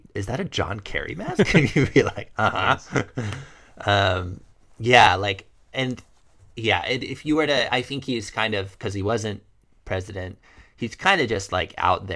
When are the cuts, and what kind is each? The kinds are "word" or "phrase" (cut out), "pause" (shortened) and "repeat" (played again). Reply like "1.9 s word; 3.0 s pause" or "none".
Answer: none